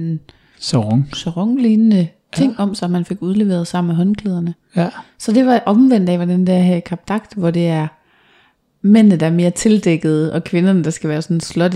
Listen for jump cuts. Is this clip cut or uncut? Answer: uncut